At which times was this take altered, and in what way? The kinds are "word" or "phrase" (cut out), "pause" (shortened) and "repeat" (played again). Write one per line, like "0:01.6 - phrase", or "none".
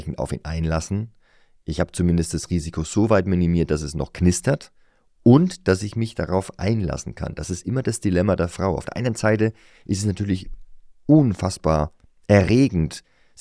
none